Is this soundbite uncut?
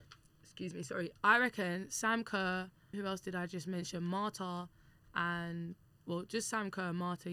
no; 1 cut; at 2.9 s

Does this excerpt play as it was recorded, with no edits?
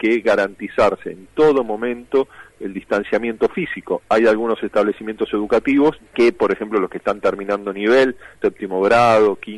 no; 2 cuts; at 6.0 s, 8.4 s

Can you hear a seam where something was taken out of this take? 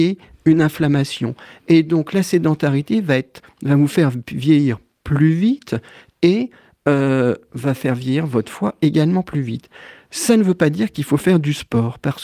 no; 0 cuts

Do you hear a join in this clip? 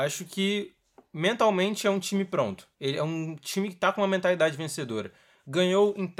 yes; 1 cut; at 2.7 s

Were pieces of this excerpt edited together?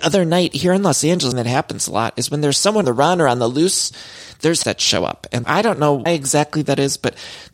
yes; 5 cuts; at 1.3 s, 2.8 s, 4.6 s, 5.4 s, 6.1 s

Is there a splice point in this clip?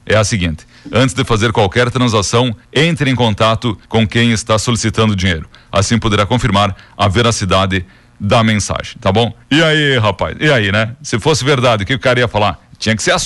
yes; 3 cuts; at 2.6 s, 3.8 s, 9.4 s

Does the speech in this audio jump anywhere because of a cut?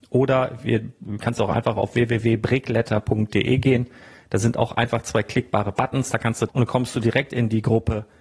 yes; 1 cut; at 6.5 s

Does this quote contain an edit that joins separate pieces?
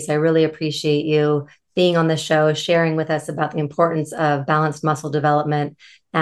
no; 0 cuts

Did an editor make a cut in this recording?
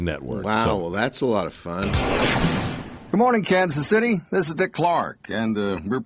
no; 0 cuts

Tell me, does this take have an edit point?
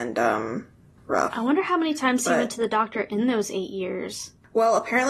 yes; 1 cut; at 1.0 s

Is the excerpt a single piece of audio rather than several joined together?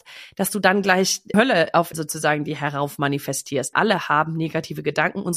no; 3 cuts; at 1.3 s, 1.9 s, 3.7 s

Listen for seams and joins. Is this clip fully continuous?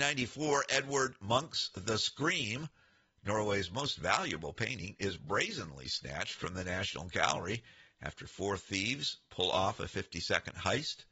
yes; 0 cuts

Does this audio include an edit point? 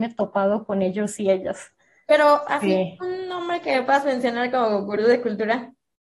no; 0 cuts

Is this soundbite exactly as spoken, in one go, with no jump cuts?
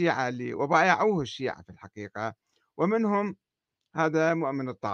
yes; 0 cuts

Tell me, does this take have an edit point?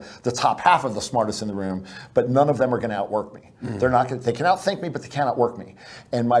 no; 0 cuts

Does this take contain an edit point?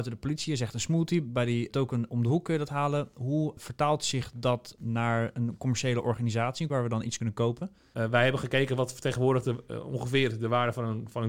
no; 0 cuts

